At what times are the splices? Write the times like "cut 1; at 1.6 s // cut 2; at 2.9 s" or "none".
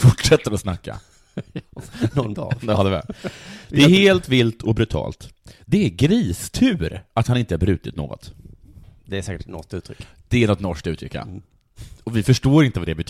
cut 1; at 2.3 s